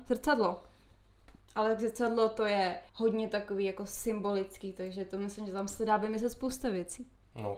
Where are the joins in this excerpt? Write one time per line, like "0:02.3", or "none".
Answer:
0:02.9